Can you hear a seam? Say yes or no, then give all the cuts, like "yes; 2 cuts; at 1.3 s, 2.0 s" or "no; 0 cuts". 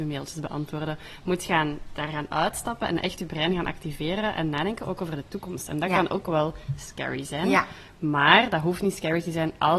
no; 0 cuts